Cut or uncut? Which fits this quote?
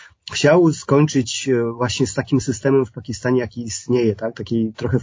uncut